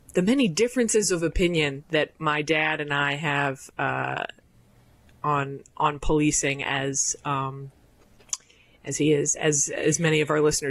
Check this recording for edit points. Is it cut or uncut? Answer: uncut